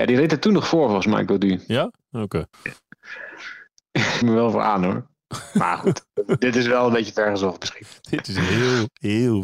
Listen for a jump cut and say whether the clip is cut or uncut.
cut